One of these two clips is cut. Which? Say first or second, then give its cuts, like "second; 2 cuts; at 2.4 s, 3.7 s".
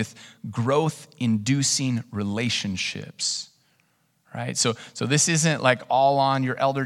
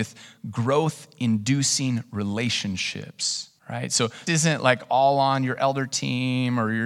second; 2 cuts; at 3.6 s, 4.3 s